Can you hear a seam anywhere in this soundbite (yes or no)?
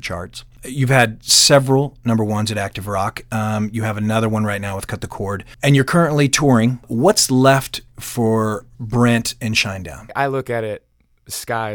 yes